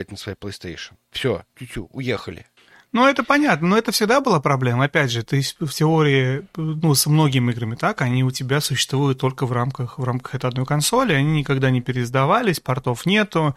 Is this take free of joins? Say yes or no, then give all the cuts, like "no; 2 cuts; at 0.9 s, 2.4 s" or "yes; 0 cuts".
no; 2 cuts; at 1.5 s, 2.6 s